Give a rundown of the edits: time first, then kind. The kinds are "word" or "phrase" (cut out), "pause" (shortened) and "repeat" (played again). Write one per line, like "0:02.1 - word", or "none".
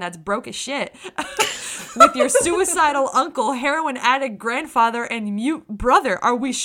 none